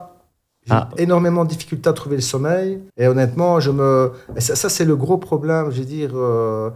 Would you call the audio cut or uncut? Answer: cut